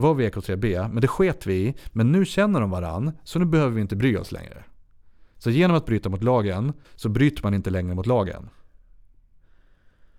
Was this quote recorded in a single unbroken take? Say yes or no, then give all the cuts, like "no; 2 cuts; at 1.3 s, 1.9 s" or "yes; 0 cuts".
no; 1 cut; at 6.8 s